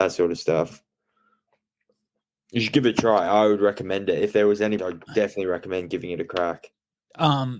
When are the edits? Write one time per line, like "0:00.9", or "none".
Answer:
0:04.8